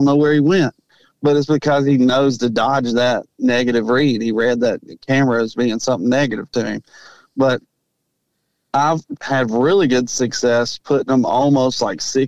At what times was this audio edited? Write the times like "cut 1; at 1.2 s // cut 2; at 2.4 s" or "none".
none